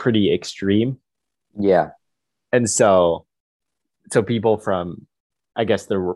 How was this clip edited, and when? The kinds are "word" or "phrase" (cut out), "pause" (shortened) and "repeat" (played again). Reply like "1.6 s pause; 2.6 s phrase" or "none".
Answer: none